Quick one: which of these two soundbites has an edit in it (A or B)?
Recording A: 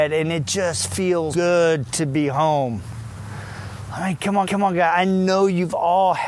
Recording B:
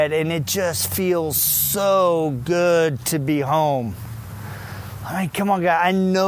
A